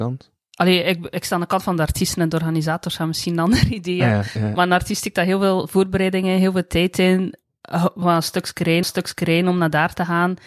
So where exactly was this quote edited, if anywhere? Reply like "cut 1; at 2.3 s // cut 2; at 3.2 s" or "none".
cut 1; at 8.0 s // cut 2; at 8.8 s